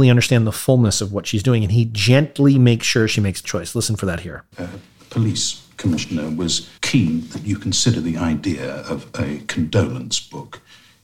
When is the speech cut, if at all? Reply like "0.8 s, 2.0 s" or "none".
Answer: 3.4 s, 4.5 s, 6.8 s